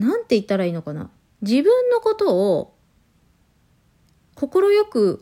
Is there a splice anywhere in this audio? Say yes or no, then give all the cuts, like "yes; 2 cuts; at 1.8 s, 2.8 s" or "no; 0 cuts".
no; 0 cuts